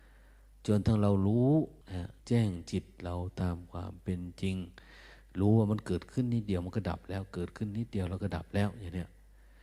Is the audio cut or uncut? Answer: cut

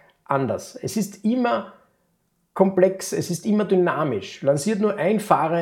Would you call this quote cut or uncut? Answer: uncut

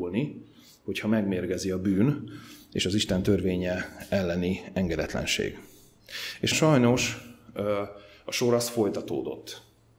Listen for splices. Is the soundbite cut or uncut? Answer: cut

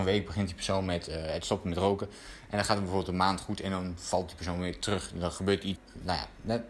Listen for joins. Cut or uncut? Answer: cut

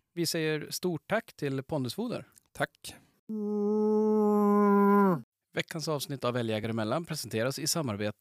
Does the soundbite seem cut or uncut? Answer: uncut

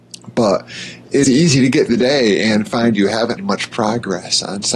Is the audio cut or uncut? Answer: cut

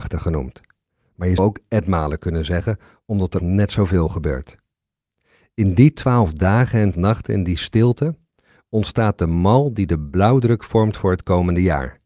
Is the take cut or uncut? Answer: cut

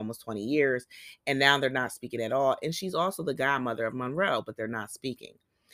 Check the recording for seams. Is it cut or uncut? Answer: uncut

